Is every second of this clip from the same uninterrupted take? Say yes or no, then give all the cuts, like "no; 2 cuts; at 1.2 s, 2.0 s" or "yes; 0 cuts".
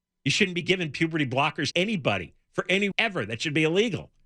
no; 2 cuts; at 1.7 s, 2.9 s